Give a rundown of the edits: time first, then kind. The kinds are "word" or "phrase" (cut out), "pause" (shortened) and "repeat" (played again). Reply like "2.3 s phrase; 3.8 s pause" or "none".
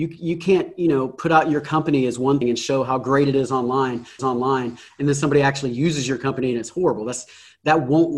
2.4 s word; 4.2 s repeat